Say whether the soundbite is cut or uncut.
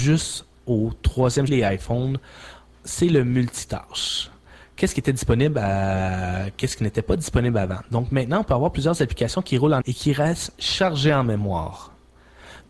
cut